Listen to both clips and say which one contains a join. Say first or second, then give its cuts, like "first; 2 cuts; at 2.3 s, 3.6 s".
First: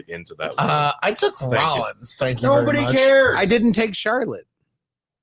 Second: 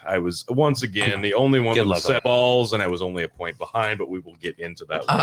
second; 1 cut; at 2.2 s